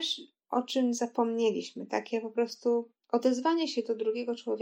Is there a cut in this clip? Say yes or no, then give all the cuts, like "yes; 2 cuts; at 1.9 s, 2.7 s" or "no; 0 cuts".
no; 0 cuts